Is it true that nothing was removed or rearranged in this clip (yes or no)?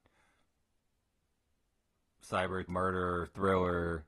no